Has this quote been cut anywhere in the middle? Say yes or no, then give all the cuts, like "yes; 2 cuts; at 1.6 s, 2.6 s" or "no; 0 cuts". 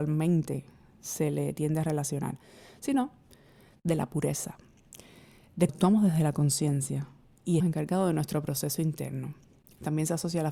yes; 2 cuts; at 5.7 s, 7.6 s